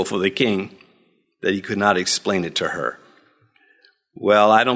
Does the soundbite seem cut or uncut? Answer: uncut